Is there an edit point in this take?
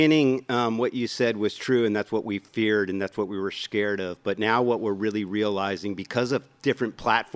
no; 0 cuts

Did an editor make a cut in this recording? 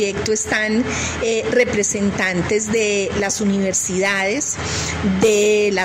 no; 0 cuts

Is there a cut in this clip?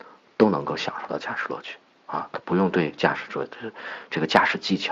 no; 0 cuts

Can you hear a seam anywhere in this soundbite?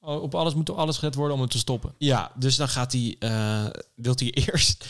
no; 0 cuts

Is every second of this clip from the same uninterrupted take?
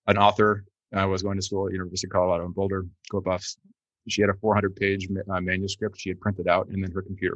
yes; 0 cuts

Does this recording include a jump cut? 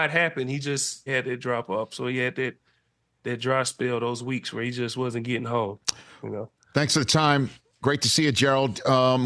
yes; 1 cut; at 1.1 s

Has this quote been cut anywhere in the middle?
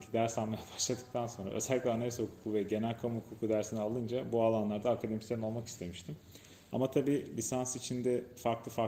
no; 0 cuts

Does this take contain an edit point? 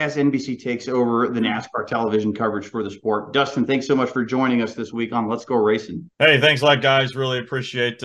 yes; 1 cut; at 6.1 s

